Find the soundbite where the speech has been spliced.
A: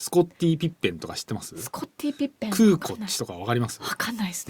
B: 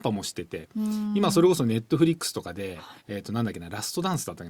B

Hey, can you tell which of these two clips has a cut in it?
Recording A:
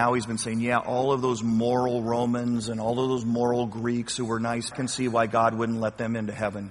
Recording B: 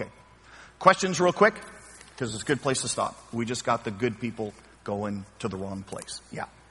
A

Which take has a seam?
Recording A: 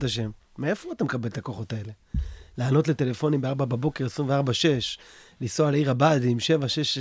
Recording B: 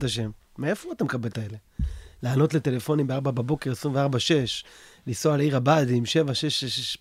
B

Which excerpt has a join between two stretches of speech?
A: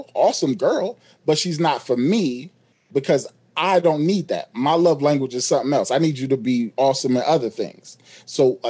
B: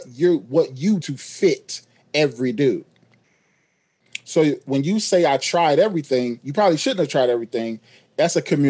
B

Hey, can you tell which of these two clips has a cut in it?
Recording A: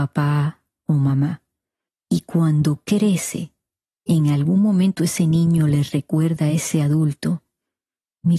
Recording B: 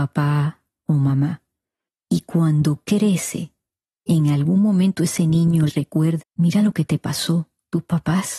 B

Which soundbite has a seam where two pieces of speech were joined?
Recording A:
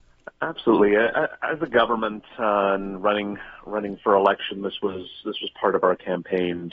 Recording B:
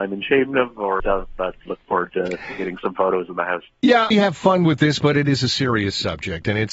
B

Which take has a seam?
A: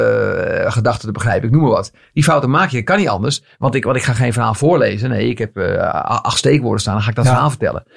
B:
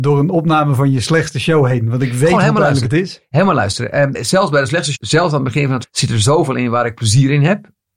B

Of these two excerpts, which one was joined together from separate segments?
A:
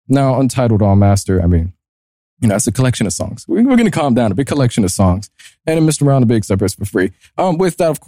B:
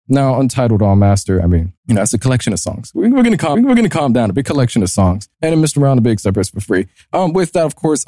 B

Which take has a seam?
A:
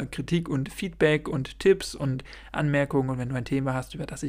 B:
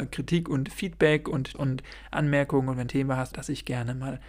B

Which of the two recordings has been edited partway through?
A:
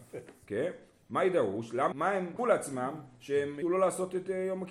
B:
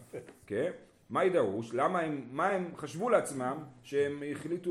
A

